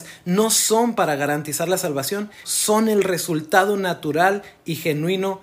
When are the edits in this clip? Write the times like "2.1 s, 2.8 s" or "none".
2.4 s